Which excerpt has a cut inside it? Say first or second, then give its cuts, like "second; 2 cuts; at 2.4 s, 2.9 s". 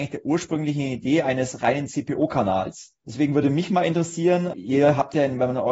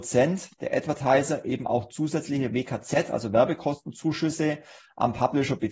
first; 2 cuts; at 3.0 s, 4.5 s